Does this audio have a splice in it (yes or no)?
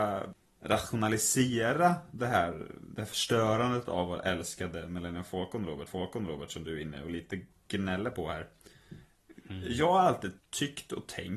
yes